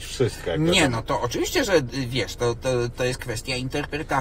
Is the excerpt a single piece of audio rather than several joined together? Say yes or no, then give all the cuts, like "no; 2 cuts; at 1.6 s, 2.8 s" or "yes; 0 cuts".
yes; 0 cuts